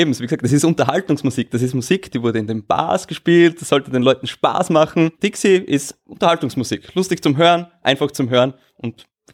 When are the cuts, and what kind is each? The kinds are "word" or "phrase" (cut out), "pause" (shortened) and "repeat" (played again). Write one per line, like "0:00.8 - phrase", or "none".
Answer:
0:05.1 - pause